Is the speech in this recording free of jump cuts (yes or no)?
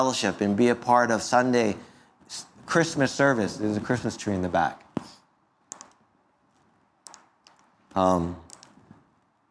yes